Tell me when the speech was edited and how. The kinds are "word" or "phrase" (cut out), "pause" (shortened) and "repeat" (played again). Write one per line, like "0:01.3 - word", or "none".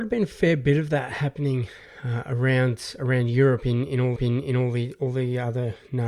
0:04.2 - repeat